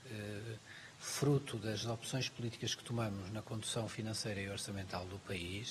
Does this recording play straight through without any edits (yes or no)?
yes